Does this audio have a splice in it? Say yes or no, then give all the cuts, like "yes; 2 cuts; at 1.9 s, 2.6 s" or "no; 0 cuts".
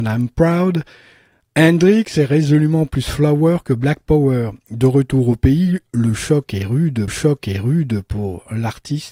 yes; 1 cut; at 7.1 s